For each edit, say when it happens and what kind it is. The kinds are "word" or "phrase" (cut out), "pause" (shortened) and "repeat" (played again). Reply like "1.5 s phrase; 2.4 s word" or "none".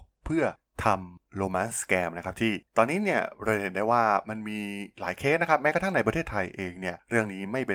2.7 s pause

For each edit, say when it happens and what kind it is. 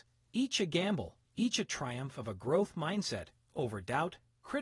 1.2 s pause

